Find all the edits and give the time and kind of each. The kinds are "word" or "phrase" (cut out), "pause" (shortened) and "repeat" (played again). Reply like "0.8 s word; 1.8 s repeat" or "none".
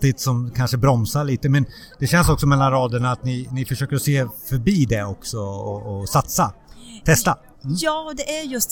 none